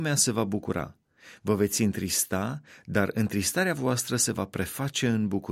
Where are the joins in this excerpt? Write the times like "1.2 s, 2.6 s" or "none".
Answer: none